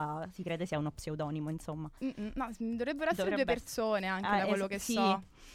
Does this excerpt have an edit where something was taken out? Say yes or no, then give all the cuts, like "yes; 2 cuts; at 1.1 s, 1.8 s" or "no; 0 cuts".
no; 0 cuts